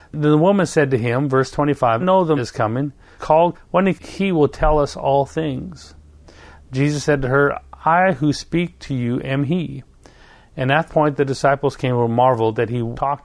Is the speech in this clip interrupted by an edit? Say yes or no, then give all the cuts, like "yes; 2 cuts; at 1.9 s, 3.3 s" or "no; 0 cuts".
yes; 6 cuts; at 2.0 s, 2.4 s, 3.2 s, 3.5 s, 4.0 s, 10.9 s